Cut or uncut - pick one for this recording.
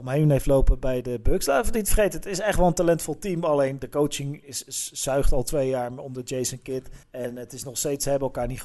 cut